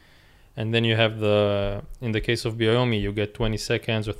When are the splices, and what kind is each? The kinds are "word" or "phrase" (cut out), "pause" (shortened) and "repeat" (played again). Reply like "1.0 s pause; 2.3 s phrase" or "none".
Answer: none